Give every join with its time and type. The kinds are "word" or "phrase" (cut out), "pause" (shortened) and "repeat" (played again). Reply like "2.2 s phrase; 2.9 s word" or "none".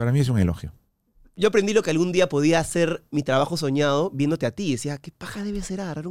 none